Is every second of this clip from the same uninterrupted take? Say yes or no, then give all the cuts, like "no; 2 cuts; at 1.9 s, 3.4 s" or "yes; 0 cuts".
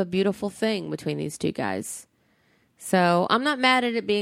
yes; 0 cuts